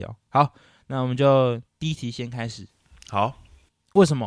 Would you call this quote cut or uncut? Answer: cut